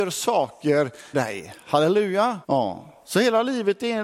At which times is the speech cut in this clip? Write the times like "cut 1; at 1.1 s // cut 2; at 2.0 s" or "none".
cut 1; at 1.1 s // cut 2; at 2.4 s